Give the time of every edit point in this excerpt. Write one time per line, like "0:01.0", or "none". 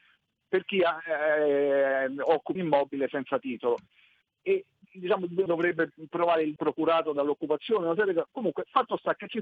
0:02.5
0:04.8
0:05.5
0:06.6